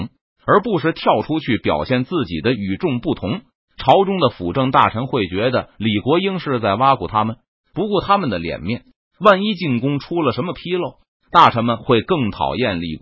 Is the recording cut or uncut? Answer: uncut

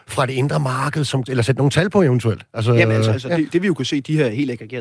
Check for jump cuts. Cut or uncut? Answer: cut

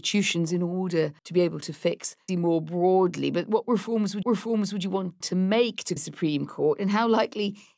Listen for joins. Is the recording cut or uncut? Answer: cut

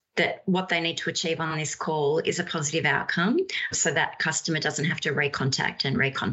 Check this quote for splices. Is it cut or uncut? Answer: uncut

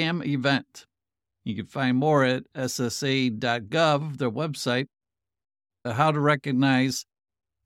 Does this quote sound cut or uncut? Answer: uncut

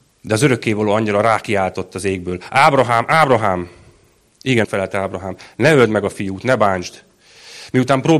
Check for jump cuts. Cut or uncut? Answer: cut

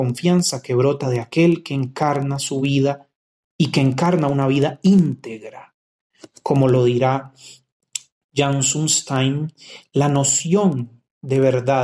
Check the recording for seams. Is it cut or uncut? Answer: uncut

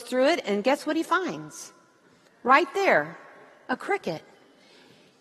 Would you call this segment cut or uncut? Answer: uncut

